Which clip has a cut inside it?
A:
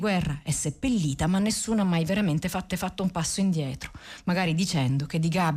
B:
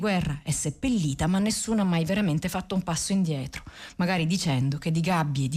A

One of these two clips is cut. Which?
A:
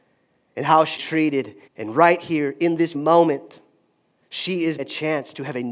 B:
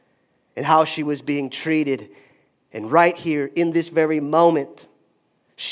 A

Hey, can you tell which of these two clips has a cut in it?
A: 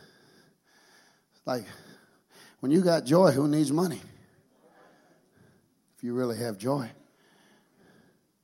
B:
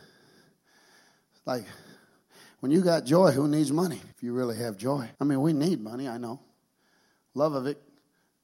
B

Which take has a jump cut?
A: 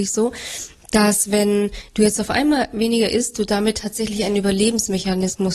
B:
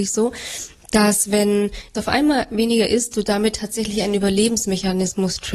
B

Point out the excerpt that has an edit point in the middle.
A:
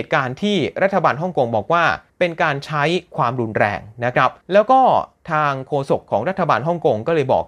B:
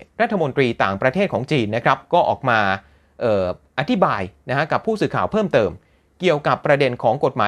A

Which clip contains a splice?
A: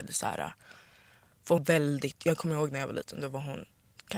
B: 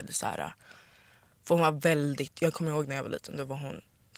A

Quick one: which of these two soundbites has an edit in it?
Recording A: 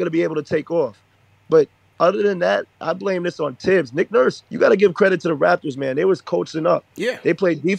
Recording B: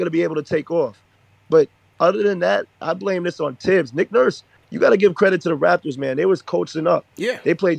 A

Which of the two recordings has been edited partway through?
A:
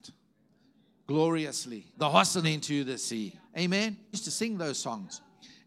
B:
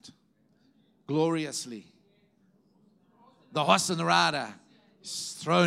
A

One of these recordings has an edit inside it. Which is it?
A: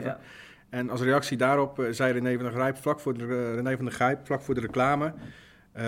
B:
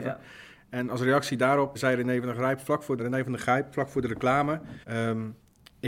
B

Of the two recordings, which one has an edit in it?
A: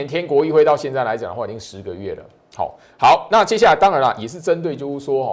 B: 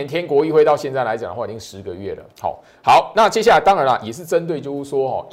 B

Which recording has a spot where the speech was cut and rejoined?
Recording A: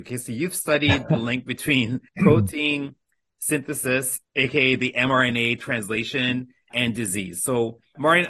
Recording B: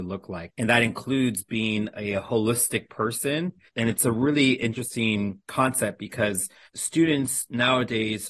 A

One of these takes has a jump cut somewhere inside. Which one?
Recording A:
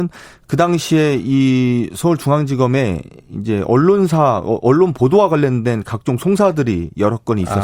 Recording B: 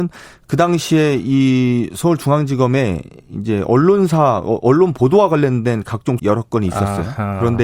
B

